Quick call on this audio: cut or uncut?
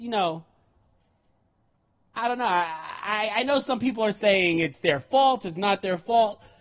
uncut